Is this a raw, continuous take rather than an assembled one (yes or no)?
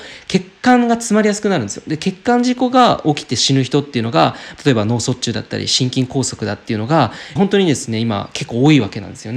no